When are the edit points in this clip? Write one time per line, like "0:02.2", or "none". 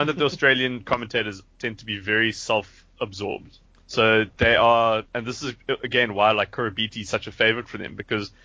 0:03.7
0:05.1